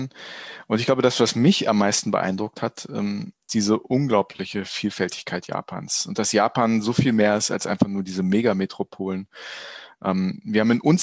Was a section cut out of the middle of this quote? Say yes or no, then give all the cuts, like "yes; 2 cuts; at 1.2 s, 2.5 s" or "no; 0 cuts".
yes; 1 cut; at 3.5 s